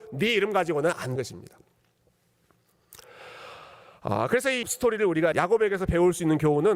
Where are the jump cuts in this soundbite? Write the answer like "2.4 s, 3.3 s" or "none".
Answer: 1.2 s, 4.6 s, 5.3 s